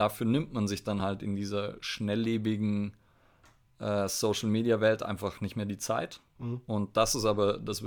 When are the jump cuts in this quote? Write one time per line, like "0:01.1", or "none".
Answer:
none